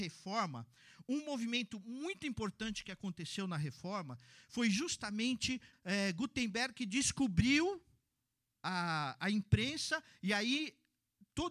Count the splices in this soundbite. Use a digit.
1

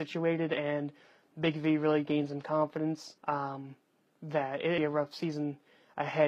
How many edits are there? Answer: 2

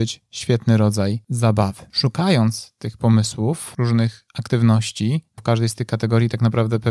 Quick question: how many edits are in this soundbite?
2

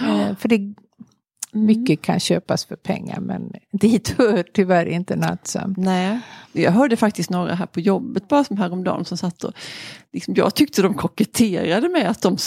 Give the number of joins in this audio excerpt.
0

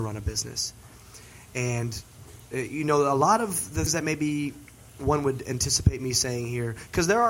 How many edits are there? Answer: 1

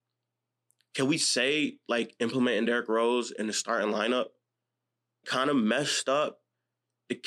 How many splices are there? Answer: 1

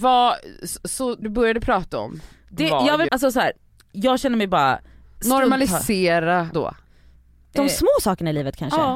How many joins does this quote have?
3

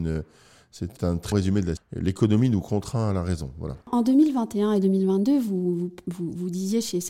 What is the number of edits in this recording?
4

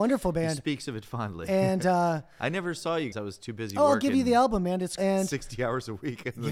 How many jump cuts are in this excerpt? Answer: 2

